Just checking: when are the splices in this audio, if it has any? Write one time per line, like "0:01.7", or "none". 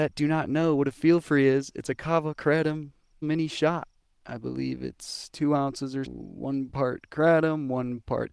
0:03.2
0:06.0

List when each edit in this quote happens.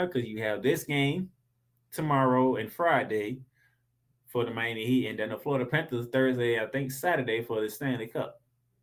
none

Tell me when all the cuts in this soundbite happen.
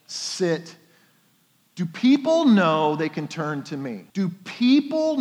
0:04.1

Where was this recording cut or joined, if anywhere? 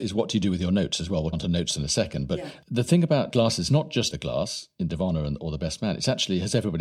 0:01.3
0:03.7
0:04.1
0:04.9

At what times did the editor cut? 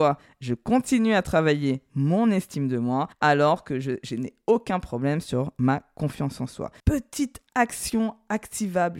0:03.1
0:06.8

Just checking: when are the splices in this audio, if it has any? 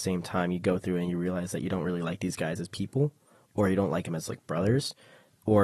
none

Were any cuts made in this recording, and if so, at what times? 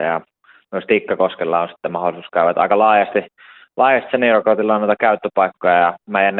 none

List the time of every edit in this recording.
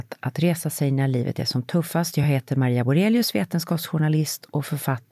none

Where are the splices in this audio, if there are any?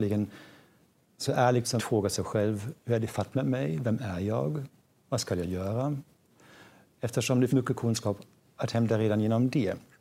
0:01.8
0:07.5

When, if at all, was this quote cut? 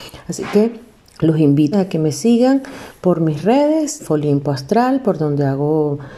0:01.0
0:01.7
0:04.0

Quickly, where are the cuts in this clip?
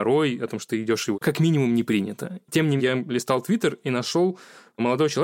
0:01.1
0:02.8

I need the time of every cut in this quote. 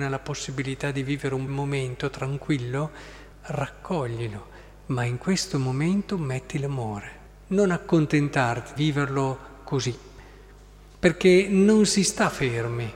0:01.5
0:03.3
0:07.3
0:08.8

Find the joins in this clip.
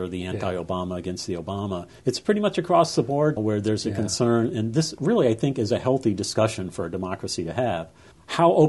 0:02.0
0:03.4

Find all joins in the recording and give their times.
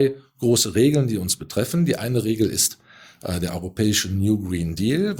none

